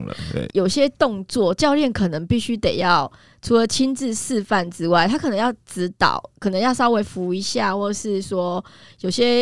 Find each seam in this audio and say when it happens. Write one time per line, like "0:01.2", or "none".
none